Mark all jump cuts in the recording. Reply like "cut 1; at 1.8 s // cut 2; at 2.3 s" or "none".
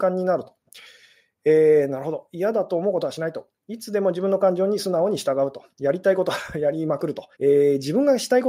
cut 1; at 5.7 s // cut 2; at 7.3 s